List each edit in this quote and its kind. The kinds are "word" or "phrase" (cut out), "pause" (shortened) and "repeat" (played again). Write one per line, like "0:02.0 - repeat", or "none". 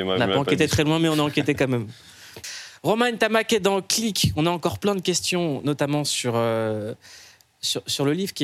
none